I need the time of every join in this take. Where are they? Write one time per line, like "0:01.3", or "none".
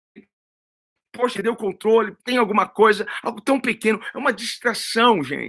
0:02.3